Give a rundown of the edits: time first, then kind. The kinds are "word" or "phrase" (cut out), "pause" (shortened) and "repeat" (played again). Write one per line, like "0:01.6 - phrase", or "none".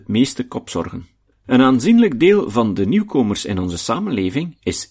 0:01.3 - pause